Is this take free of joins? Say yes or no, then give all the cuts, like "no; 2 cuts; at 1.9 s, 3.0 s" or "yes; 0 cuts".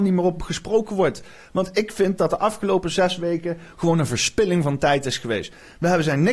yes; 0 cuts